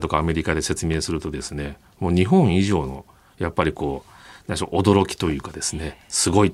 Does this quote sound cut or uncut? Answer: uncut